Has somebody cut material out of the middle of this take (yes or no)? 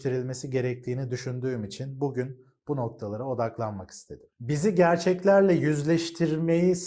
no